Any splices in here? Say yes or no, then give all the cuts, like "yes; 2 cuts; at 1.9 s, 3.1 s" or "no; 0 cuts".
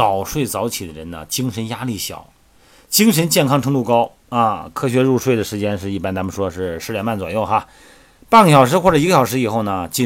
no; 0 cuts